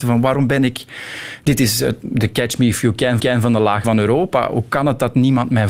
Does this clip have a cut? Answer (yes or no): yes